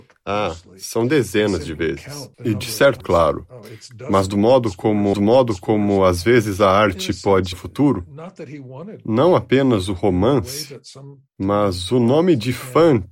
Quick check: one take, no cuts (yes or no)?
no